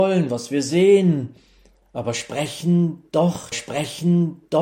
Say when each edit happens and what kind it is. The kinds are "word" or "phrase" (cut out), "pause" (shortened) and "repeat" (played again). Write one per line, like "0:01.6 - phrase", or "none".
0:03.5 - repeat